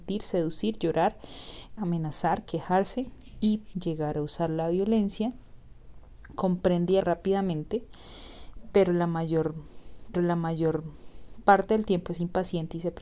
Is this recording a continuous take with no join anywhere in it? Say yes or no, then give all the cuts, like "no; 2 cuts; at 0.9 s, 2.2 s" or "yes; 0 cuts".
no; 4 cuts; at 1.8 s, 3.7 s, 7.0 s, 10.1 s